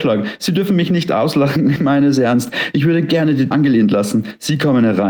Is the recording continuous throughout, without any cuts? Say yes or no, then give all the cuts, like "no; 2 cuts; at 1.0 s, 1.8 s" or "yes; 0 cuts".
no; 2 cuts; at 1.8 s, 3.5 s